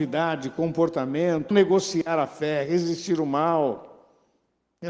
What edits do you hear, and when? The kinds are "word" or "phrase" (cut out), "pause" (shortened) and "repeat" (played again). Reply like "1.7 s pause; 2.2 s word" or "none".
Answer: 1.5 s word